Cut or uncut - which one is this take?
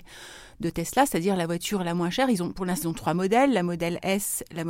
cut